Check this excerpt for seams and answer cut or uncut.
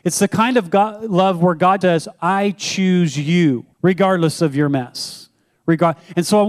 cut